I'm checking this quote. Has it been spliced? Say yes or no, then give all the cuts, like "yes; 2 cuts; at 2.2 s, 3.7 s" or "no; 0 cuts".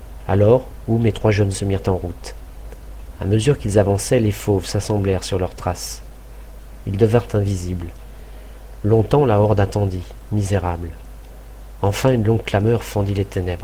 yes; 1 cut; at 1.5 s